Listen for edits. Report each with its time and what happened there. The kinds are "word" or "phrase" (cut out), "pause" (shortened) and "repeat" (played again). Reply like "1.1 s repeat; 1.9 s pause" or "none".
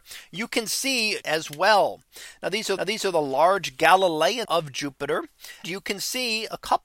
1.2 s phrase; 2.8 s repeat; 4.4 s word; 5.6 s word